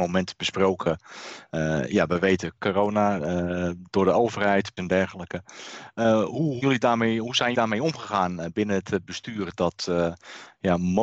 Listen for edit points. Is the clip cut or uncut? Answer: cut